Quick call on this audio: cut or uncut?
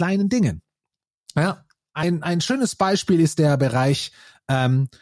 uncut